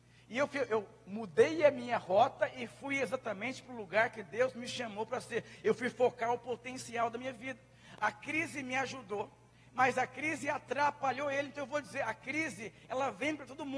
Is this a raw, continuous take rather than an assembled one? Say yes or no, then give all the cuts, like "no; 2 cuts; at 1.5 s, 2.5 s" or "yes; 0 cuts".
yes; 0 cuts